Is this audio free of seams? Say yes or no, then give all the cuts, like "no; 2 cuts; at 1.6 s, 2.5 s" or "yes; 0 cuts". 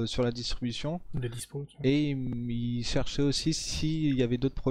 yes; 0 cuts